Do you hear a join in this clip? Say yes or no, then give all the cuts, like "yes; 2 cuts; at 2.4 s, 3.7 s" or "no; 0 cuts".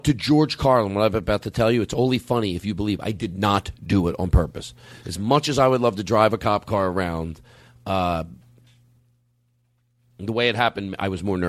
no; 0 cuts